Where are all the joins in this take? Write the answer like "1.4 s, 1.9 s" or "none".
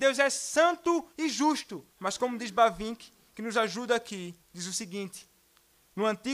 1.1 s, 1.9 s, 4.4 s